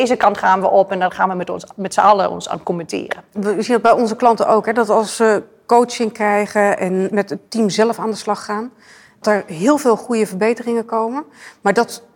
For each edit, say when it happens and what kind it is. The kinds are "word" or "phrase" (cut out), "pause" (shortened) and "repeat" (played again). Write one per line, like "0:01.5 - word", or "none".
0:09.2 - word